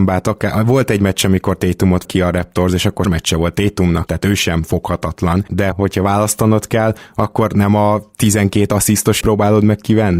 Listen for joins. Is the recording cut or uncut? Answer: cut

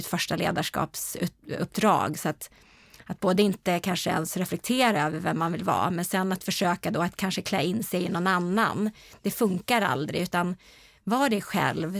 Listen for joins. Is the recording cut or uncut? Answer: uncut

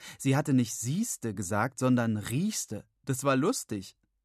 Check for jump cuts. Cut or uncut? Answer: uncut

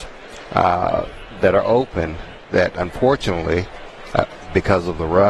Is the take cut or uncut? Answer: cut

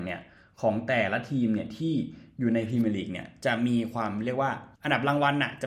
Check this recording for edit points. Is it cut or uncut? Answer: cut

